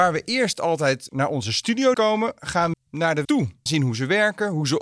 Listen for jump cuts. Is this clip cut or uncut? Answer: cut